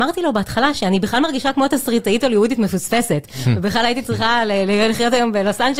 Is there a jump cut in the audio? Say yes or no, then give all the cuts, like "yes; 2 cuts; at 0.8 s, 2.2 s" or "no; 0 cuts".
no; 0 cuts